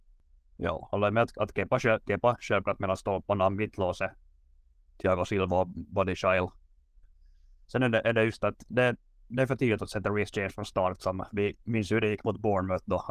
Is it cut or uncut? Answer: uncut